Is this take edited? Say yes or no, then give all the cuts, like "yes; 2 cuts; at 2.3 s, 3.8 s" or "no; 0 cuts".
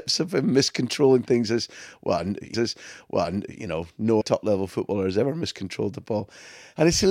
yes; 2 cuts; at 2.5 s, 4.2 s